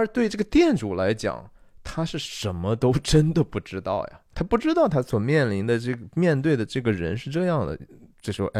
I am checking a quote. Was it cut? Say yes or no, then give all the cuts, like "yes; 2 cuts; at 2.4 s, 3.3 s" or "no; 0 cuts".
yes; 1 cut; at 4.3 s